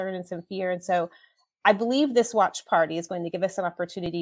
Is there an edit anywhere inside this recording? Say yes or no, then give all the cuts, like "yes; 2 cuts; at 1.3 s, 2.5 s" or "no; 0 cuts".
no; 0 cuts